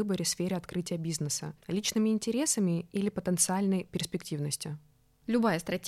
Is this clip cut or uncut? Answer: uncut